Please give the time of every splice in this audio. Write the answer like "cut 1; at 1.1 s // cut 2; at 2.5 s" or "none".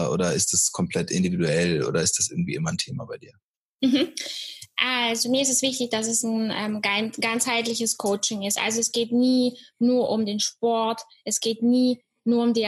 none